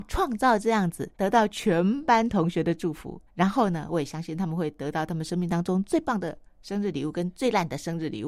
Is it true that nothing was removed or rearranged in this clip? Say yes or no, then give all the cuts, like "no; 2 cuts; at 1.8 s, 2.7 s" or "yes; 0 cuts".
no; 2 cuts; at 1.1 s, 3.3 s